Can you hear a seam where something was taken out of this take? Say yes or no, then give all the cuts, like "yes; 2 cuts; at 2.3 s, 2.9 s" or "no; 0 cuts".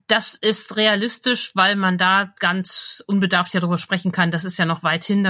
no; 0 cuts